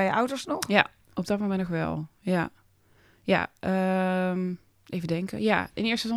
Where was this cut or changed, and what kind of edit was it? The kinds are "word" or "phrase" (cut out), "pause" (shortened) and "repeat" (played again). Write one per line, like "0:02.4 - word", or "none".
none